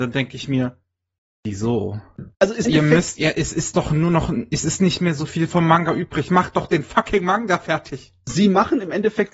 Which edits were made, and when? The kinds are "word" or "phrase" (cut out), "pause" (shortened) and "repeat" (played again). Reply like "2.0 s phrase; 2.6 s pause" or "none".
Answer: 2.3 s pause; 2.6 s word